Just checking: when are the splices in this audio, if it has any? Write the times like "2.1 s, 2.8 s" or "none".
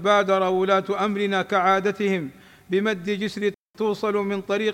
none